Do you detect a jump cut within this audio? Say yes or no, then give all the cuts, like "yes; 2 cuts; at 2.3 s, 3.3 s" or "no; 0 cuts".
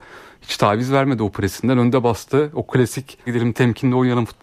yes; 1 cut; at 3.3 s